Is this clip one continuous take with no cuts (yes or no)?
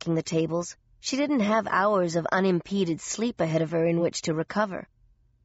yes